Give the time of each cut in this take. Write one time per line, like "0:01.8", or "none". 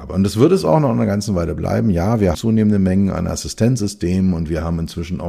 0:02.3